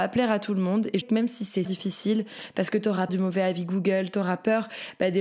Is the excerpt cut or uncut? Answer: cut